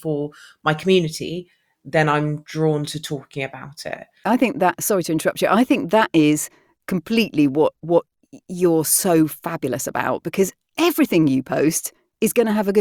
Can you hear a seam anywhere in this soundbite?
no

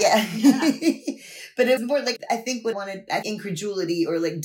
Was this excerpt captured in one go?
no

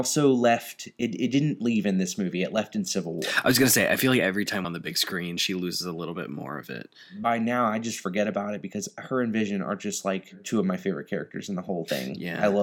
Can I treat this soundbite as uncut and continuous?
no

